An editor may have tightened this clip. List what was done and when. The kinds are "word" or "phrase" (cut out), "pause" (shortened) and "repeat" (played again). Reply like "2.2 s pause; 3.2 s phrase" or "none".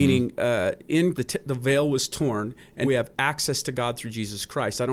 1.1 s word; 2.8 s word